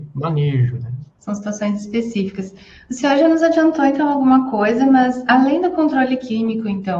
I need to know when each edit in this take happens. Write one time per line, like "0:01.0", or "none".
0:01.1